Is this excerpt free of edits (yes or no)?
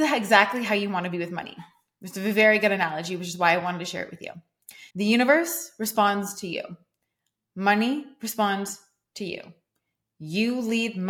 no